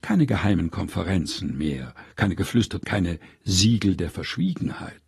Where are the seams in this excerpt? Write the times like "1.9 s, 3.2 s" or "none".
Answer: 2.1 s, 2.8 s